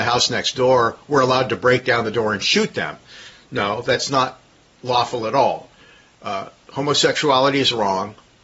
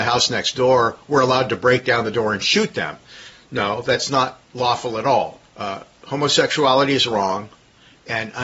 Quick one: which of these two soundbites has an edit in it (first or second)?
second